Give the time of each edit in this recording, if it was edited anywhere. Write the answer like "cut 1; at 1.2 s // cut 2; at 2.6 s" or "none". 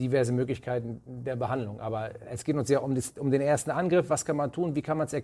none